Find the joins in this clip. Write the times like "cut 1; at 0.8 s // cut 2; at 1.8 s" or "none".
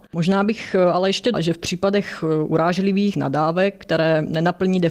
cut 1; at 1.3 s // cut 2; at 3.1 s